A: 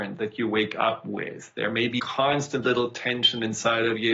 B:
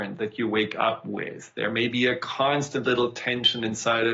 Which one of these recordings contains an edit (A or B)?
A